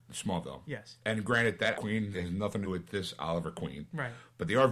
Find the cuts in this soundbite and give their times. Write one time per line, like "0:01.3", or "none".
0:01.7
0:02.1
0:02.6